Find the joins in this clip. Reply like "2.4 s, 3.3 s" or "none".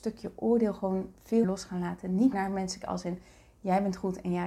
1.4 s, 2.3 s, 2.8 s